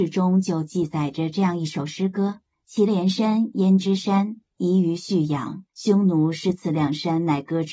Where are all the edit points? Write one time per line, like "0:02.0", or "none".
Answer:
0:02.5
0:04.5
0:05.7